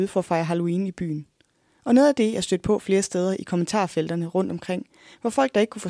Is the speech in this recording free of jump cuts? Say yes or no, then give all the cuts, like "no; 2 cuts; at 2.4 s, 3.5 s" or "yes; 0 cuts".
yes; 0 cuts